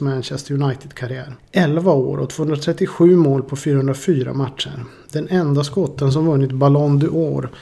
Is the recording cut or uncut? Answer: uncut